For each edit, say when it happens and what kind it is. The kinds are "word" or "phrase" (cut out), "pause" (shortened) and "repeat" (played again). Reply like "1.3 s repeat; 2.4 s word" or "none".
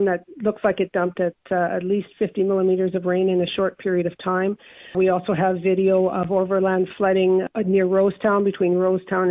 none

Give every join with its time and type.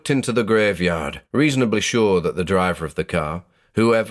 1.3 s pause

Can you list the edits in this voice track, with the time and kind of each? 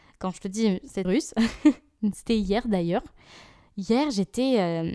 1.0 s phrase

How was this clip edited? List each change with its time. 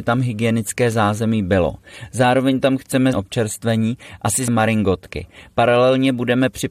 3.1 s phrase; 4.5 s word

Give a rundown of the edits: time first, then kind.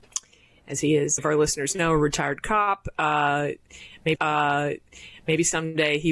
1.2 s phrase; 4.2 s repeat

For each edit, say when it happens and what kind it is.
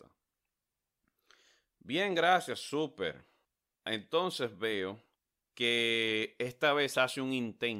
3.4 s pause; 5.2 s pause

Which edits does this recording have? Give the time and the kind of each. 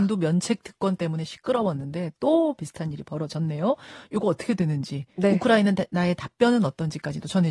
none

